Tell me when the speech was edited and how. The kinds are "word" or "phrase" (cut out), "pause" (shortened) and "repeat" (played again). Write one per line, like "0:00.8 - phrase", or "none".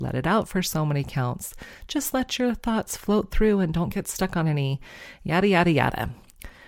none